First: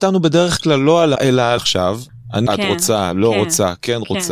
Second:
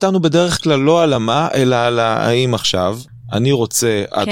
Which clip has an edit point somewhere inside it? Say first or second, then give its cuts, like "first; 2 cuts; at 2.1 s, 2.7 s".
first; 3 cuts; at 1.2 s, 1.6 s, 2.5 s